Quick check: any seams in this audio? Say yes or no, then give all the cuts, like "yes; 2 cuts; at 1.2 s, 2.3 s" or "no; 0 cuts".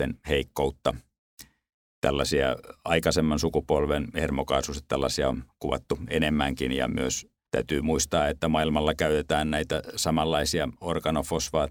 no; 0 cuts